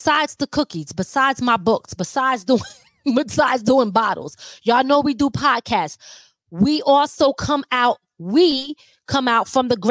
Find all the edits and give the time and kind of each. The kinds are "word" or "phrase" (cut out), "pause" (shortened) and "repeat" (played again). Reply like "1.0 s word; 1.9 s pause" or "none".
none